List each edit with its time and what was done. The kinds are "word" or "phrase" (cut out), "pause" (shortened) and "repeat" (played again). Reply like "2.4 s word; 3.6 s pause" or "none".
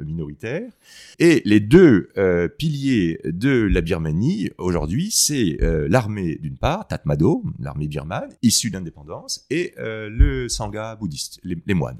1.1 s pause; 8.4 s pause